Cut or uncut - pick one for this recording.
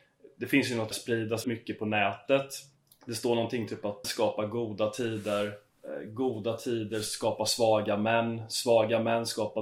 cut